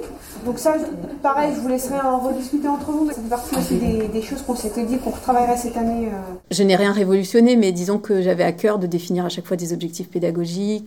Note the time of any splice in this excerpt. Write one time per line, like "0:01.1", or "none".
0:03.1